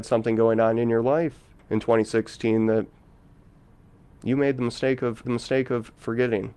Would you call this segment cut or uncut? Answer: cut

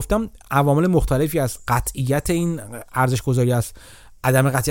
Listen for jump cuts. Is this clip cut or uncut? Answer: uncut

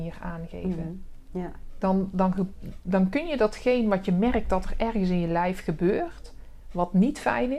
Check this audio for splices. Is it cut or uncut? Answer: uncut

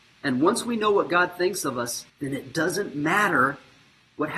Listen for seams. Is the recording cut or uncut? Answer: cut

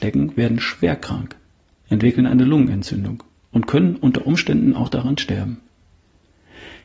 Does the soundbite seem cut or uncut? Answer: uncut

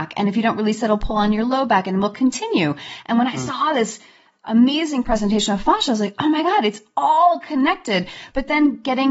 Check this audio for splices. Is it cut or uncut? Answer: uncut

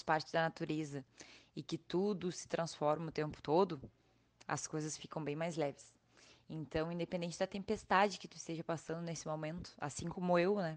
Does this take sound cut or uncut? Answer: uncut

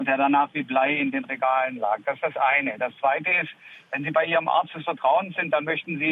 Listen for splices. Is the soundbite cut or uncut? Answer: uncut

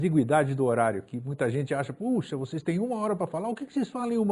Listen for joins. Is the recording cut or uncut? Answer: uncut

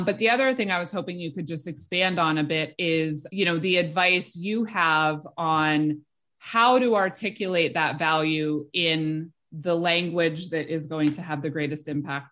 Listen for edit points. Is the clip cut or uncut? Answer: cut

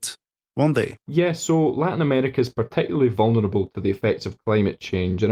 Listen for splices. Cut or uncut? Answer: cut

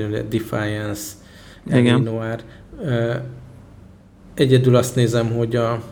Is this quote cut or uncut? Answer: uncut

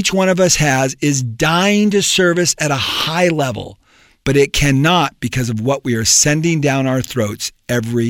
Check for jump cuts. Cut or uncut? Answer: uncut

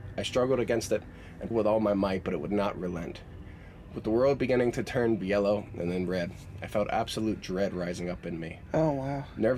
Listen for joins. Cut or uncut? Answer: cut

